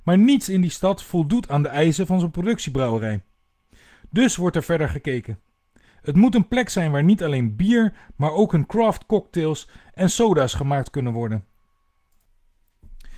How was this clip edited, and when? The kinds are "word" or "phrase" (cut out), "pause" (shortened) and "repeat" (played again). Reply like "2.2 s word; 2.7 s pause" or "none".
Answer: none